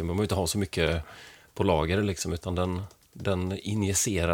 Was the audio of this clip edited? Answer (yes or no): no